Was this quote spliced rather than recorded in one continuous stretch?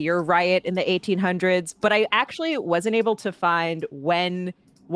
no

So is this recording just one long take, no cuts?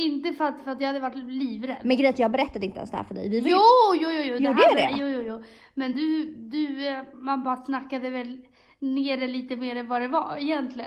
yes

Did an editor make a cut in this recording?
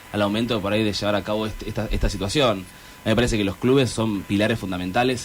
no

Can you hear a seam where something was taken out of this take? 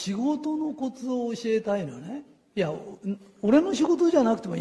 no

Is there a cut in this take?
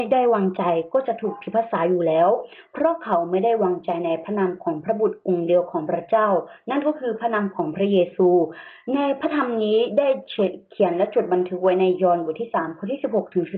no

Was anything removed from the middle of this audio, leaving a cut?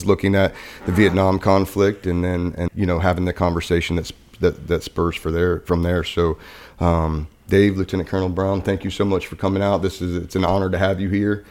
yes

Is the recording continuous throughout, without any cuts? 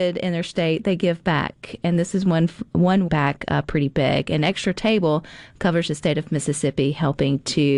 no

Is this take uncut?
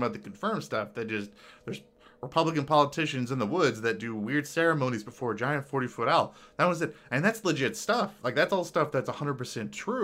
yes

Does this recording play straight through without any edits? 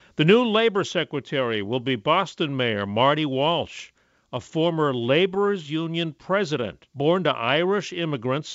no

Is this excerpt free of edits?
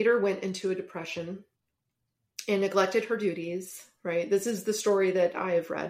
yes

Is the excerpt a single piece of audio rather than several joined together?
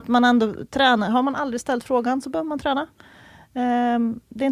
yes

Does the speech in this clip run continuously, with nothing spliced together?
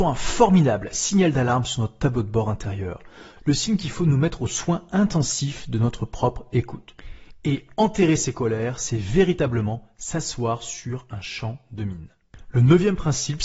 yes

